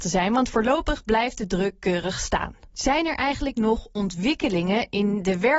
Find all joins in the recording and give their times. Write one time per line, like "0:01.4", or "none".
0:02.7